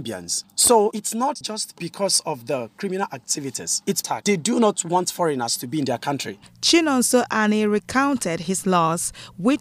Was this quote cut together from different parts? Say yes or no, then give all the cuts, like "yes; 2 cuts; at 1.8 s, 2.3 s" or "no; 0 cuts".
no; 0 cuts